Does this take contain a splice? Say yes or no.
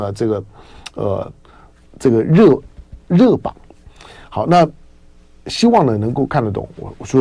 no